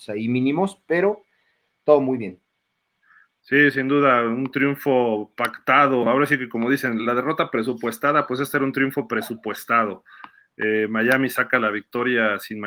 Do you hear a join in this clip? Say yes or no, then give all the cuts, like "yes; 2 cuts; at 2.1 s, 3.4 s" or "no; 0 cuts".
no; 0 cuts